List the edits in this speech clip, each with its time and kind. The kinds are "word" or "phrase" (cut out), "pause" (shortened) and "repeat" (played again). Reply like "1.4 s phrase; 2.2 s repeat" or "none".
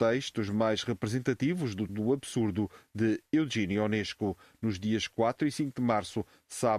1.9 s word